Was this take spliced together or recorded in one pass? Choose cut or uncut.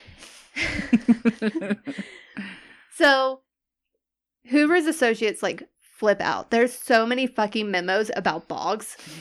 uncut